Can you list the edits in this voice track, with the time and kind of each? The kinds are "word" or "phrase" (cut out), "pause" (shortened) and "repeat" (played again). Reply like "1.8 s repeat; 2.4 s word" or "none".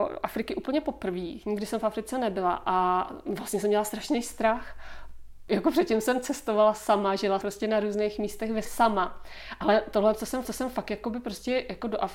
7.4 s word; 8.6 s word; 10.4 s repeat